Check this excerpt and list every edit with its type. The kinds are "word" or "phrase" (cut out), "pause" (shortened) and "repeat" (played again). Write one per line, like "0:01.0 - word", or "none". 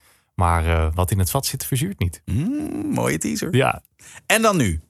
none